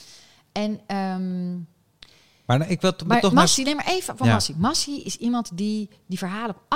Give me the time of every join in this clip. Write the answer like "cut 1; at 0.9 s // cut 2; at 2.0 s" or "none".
none